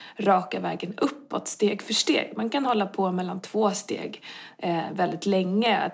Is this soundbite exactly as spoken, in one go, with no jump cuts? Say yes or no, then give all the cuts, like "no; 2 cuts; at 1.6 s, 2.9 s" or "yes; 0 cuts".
yes; 0 cuts